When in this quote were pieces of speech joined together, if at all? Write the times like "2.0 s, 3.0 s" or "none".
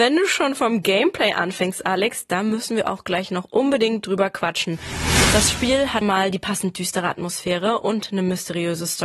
6.0 s

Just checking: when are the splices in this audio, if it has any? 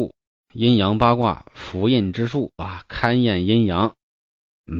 2.6 s

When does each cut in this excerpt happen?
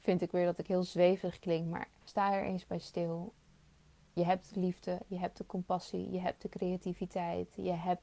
none

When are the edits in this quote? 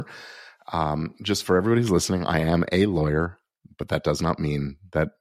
none

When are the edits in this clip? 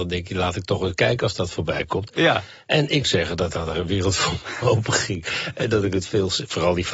3.0 s

